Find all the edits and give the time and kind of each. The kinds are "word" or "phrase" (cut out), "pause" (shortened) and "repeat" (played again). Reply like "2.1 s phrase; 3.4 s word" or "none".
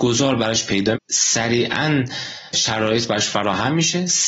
0.9 s word; 2.5 s word

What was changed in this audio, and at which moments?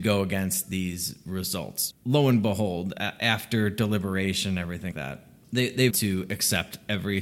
1.9 s word; 4.9 s word; 5.9 s word

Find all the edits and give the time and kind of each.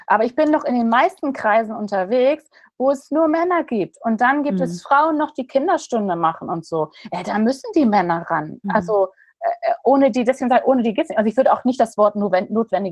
none

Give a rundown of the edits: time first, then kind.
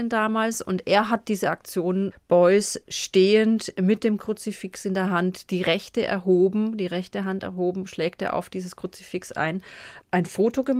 none

